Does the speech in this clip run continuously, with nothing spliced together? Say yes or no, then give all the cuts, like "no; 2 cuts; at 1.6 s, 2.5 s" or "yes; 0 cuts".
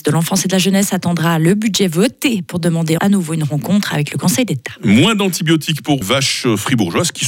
no; 2 cuts; at 3.0 s, 6.0 s